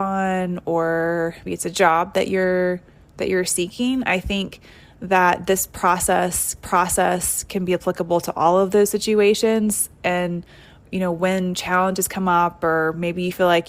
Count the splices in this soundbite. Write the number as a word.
two